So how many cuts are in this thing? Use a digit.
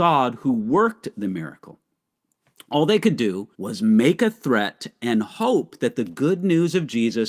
1